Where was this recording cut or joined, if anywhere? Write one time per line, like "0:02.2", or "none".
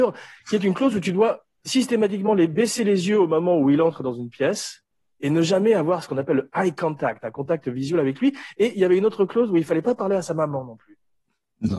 none